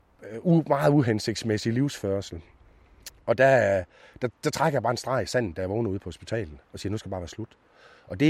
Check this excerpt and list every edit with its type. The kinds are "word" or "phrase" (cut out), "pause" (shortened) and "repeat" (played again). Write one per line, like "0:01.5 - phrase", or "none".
none